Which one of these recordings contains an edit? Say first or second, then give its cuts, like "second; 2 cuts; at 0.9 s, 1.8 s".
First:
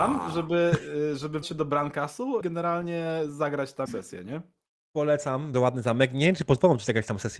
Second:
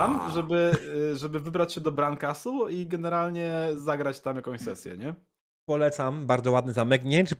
first; 4 cuts; at 1.4 s, 2.4 s, 3.9 s, 5.5 s